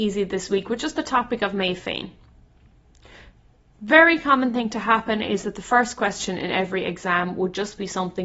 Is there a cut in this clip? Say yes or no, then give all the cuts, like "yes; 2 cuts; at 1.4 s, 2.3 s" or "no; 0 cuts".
no; 0 cuts